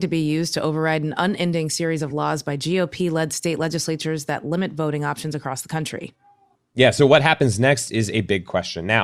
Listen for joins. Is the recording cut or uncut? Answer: uncut